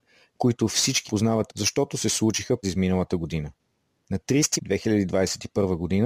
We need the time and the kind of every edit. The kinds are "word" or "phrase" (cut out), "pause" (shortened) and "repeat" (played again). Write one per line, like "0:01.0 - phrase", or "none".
0:01.1 - word
0:01.5 - word
0:02.6 - word
0:04.6 - word